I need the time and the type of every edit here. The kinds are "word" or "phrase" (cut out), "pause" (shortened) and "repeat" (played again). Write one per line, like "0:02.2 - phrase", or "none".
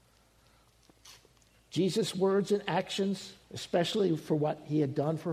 0:03.4 - pause